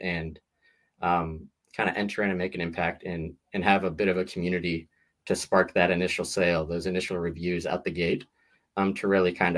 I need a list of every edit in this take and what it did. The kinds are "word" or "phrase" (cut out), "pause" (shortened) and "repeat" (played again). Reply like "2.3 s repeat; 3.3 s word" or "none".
none